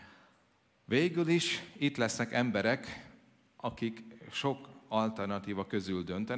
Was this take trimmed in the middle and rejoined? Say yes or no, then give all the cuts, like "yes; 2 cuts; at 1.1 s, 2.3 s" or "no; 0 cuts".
no; 0 cuts